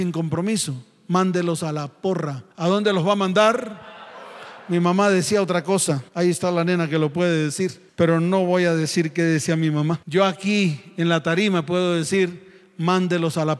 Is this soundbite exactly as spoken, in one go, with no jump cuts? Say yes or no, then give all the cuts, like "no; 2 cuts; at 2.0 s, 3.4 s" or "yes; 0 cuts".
no; 3 cuts; at 2.5 s, 6.1 s, 10.0 s